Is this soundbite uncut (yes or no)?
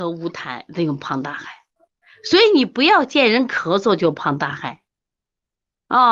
yes